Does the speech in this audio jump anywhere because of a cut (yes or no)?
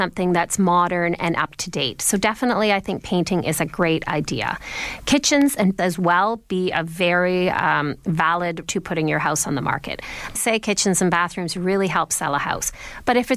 yes